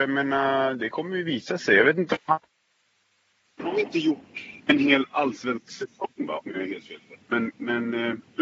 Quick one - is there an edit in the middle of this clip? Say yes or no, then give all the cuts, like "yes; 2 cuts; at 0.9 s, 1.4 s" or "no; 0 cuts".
no; 0 cuts